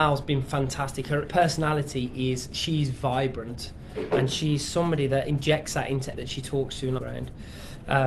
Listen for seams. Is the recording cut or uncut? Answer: cut